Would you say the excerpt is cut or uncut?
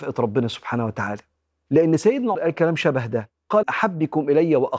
cut